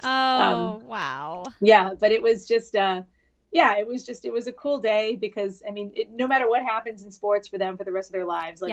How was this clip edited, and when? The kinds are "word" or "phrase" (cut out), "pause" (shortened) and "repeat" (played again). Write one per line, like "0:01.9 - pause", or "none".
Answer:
none